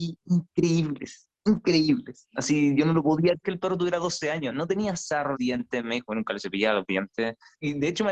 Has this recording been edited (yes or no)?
yes